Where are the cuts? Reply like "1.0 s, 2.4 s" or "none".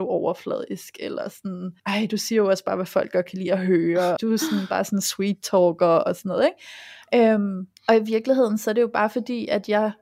1.8 s, 4.2 s, 7.8 s